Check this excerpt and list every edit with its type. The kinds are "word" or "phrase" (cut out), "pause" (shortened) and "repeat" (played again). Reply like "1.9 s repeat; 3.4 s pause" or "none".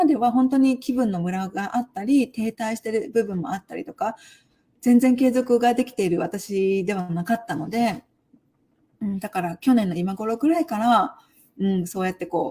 none